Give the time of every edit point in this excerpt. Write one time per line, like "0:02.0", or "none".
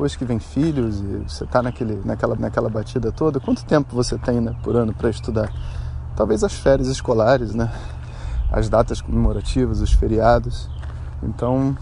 0:02.4